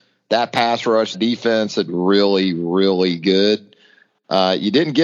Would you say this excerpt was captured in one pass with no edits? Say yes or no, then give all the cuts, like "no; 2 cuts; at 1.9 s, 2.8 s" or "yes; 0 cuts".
no; 2 cuts; at 1.1 s, 1.9 s